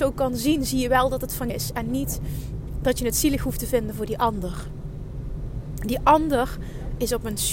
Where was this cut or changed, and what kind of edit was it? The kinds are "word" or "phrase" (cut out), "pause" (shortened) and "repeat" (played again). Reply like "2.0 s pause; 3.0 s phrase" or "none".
1.5 s word